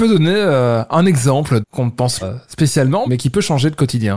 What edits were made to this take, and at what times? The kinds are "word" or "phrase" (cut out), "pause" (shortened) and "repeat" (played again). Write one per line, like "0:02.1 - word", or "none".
0:01.6 - phrase
0:02.2 - word
0:03.1 - word